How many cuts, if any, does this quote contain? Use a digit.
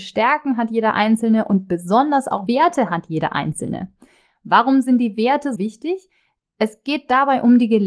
2